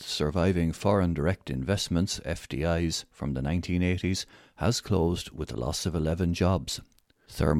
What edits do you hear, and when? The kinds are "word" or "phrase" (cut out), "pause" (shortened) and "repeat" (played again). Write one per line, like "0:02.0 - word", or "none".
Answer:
none